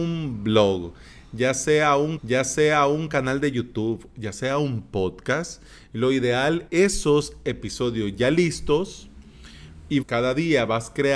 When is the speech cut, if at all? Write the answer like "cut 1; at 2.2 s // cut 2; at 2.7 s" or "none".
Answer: cut 1; at 2.2 s // cut 2; at 6.7 s // cut 3; at 10.0 s